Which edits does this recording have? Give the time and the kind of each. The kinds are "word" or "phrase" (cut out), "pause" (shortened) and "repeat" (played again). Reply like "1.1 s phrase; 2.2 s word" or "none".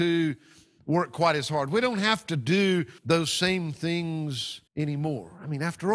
3.0 s pause; 4.7 s pause